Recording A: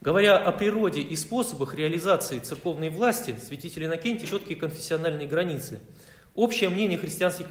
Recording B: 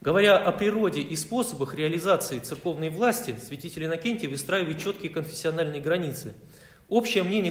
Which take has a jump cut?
A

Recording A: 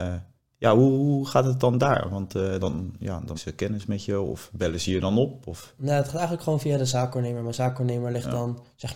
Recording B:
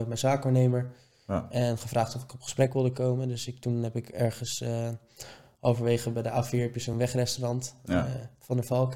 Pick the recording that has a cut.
A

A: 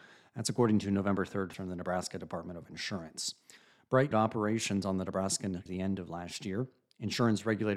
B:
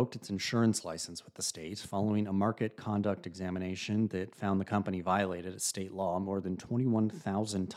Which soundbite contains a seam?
A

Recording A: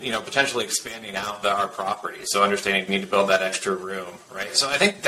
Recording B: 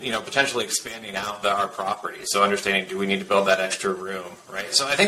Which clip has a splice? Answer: A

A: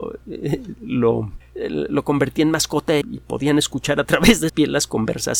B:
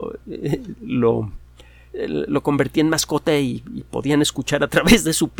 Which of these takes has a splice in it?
A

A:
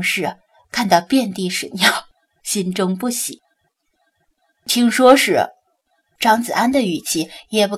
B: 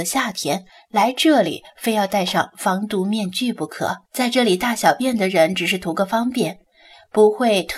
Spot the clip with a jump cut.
B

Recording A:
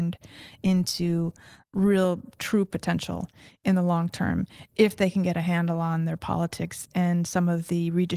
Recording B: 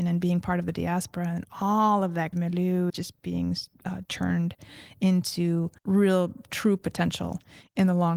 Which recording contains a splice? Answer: B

